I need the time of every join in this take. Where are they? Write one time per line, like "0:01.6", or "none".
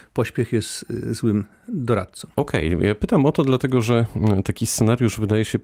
0:02.3